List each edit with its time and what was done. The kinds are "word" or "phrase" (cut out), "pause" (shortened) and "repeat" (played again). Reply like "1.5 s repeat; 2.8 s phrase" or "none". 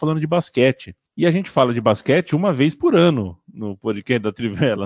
1.1 s pause